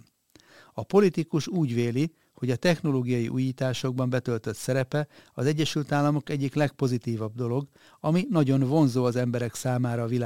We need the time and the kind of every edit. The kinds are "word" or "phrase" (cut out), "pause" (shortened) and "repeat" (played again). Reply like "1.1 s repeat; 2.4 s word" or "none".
none

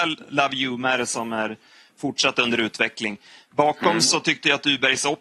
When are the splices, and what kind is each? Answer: none

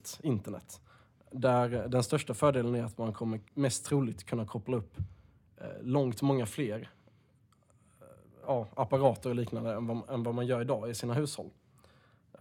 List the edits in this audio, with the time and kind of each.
3.5 s pause

